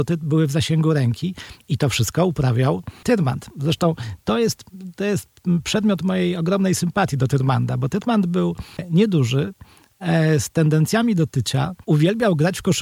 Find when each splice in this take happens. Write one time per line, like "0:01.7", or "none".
0:11.8